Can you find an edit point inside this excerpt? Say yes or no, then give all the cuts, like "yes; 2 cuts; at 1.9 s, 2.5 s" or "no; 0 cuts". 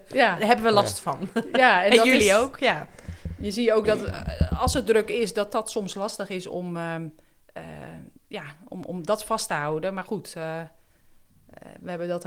no; 0 cuts